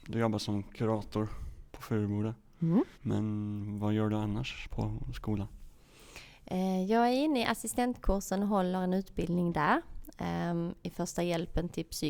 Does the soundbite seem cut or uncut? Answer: cut